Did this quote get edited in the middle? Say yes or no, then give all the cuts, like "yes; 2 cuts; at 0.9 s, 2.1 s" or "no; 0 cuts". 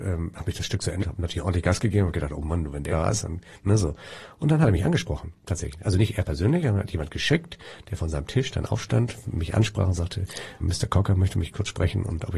yes; 4 cuts; at 1.0 s, 2.9 s, 9.2 s, 10.6 s